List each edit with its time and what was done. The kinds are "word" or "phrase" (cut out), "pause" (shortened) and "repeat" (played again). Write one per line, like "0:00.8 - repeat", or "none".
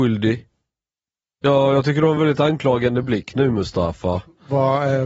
none